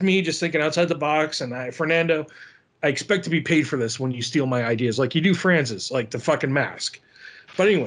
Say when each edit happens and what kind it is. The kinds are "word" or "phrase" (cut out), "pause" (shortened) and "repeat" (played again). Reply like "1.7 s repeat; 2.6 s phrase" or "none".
none

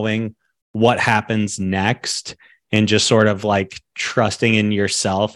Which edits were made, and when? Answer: none

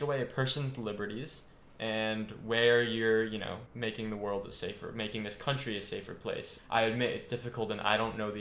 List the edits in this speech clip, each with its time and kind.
3.7 s word; 6.6 s word

